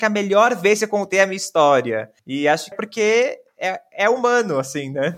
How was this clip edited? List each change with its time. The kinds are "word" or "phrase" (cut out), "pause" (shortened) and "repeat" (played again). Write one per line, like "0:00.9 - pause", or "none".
0:02.2 - pause
0:02.7 - phrase